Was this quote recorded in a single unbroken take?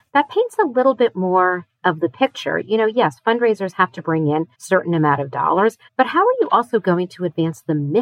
no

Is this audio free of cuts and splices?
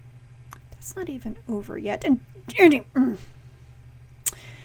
yes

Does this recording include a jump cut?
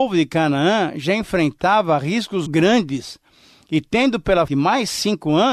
yes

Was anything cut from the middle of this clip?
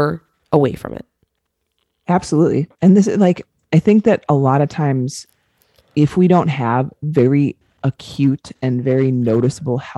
no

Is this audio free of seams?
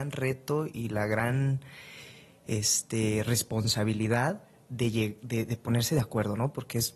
yes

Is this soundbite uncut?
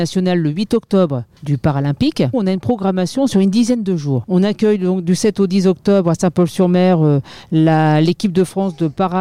no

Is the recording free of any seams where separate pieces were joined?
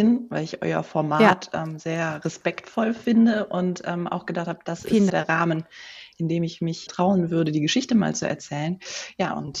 no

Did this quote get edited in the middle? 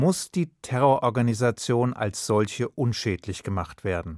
no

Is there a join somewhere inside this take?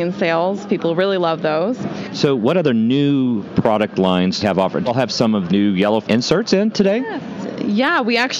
yes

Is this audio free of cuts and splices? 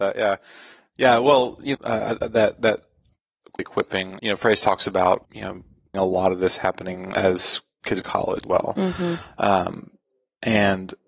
no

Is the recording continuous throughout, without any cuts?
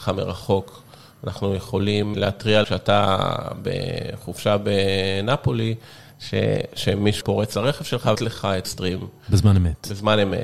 no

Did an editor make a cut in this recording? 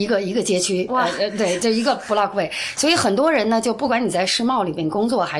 no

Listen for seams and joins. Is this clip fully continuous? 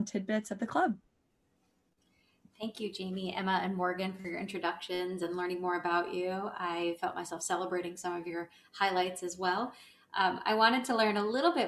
yes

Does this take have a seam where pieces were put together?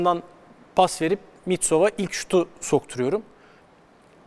no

